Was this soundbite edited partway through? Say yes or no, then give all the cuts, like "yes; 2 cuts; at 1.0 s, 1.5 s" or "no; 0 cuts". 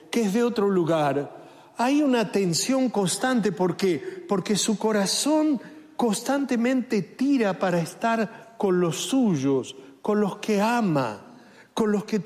no; 0 cuts